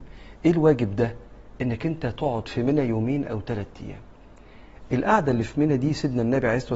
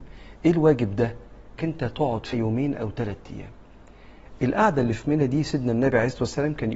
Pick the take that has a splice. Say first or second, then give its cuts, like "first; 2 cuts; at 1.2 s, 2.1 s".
second; 2 cuts; at 1.6 s, 2.3 s